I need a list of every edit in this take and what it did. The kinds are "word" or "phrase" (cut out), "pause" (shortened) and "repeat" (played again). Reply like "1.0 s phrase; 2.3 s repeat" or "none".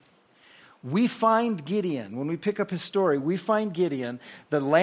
none